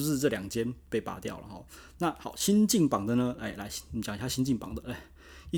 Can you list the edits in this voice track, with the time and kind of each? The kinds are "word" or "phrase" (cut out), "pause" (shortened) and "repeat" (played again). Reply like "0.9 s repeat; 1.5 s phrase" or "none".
none